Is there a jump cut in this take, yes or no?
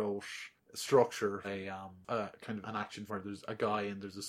yes